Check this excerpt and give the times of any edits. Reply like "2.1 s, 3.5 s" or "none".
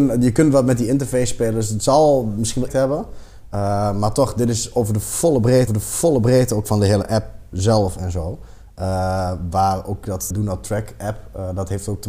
2.7 s, 5.7 s, 10.3 s